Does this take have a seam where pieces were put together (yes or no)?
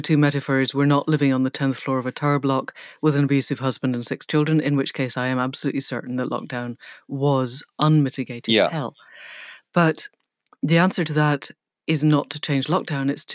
no